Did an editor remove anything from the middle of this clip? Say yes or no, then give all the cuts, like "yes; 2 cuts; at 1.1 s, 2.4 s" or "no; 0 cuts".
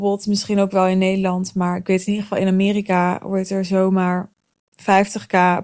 no; 0 cuts